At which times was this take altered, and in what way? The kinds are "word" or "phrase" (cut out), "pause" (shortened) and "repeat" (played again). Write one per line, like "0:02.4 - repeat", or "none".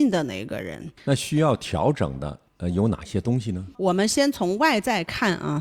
0:02.5 - pause
0:03.7 - pause